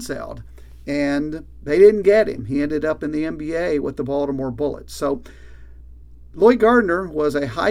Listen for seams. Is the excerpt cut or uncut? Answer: uncut